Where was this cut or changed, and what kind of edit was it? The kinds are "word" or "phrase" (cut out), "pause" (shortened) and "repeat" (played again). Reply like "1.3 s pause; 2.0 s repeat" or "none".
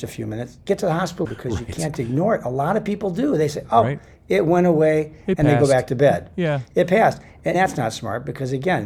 1.2 s word